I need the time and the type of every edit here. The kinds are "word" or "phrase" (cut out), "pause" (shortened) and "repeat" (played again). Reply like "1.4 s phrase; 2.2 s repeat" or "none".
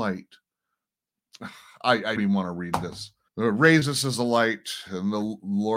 2.2 s word; 3.3 s pause